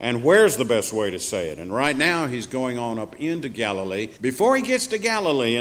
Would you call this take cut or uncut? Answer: cut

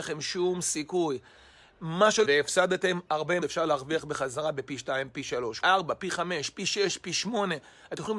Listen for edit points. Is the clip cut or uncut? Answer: cut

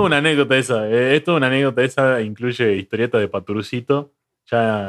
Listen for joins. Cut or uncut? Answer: uncut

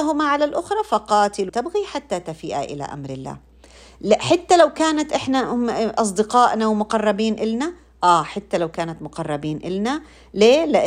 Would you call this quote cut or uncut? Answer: cut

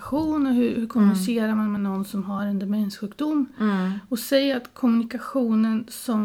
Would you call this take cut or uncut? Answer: uncut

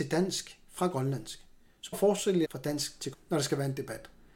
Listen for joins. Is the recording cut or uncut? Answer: cut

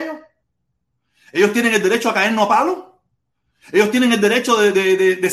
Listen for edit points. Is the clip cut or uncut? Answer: uncut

